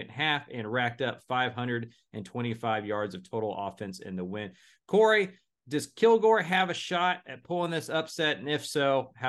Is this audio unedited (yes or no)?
yes